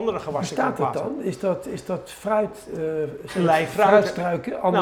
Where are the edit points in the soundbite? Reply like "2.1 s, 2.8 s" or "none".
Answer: none